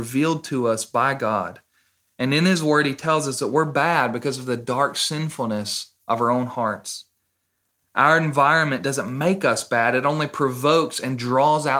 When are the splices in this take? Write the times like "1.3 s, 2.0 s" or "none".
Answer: none